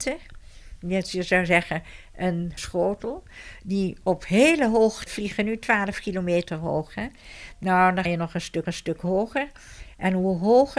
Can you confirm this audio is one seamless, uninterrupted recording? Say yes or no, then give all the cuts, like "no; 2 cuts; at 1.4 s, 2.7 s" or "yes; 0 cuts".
no; 4 cuts; at 2.6 s, 5.1 s, 8.1 s, 8.7 s